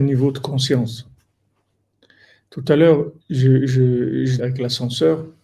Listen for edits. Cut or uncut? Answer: cut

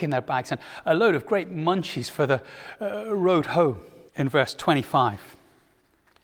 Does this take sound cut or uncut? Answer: cut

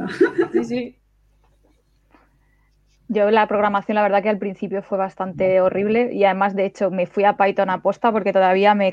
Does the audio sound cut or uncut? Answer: uncut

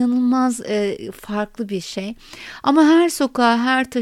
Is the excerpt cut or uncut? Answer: uncut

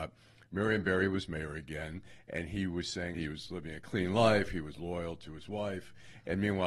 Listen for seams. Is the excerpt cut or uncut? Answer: cut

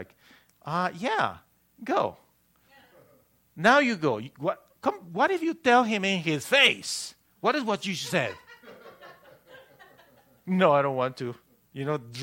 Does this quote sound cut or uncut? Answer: uncut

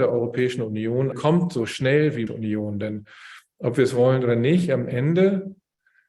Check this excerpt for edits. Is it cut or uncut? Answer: cut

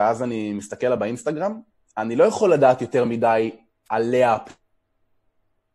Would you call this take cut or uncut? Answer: uncut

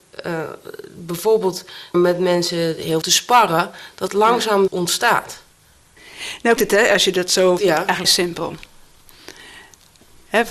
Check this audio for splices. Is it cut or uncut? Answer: cut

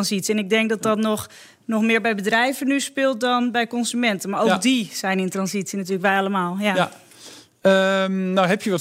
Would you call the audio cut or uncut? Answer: uncut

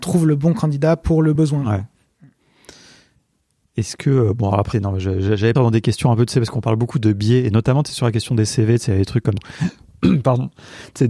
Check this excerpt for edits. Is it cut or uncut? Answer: cut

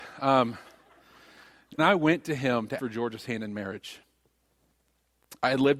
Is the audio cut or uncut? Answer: cut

